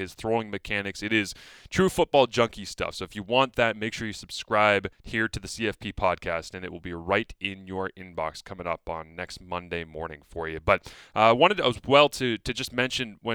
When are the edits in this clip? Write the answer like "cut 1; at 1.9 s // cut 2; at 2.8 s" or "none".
cut 1; at 4.9 s // cut 2; at 9.1 s